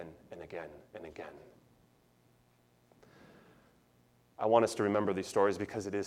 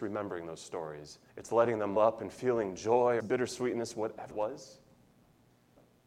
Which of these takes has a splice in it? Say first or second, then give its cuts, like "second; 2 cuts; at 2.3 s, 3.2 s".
second; 4 cuts; at 1.3 s, 2.0 s, 3.2 s, 4.3 s